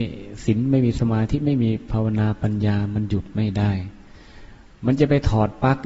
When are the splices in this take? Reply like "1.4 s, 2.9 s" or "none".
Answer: none